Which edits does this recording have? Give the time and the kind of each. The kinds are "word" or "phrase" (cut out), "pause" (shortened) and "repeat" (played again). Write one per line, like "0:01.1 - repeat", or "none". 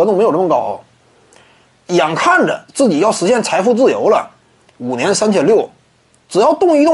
0:02.7 - pause